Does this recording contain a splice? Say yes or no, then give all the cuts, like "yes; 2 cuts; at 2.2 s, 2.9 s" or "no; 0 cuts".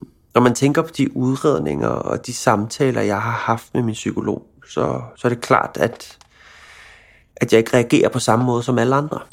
no; 0 cuts